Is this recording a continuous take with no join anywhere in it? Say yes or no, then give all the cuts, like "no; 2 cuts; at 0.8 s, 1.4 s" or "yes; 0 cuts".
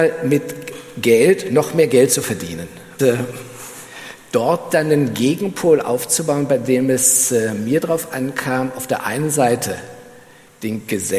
no; 1 cut; at 3.0 s